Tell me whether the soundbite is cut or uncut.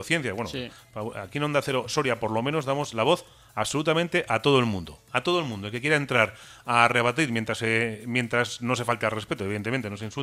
uncut